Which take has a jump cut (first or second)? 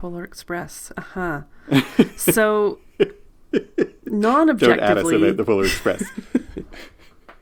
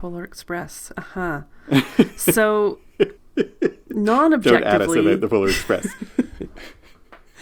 second